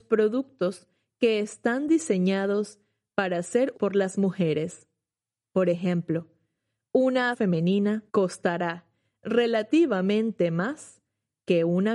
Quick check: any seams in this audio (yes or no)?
yes